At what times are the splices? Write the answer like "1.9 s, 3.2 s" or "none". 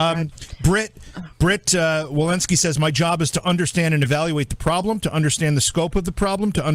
none